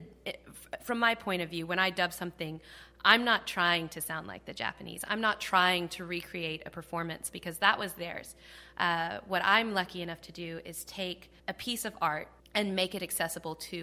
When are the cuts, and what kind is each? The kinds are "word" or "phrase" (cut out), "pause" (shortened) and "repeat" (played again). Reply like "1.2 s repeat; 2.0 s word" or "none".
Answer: 11.4 s pause; 12.4 s pause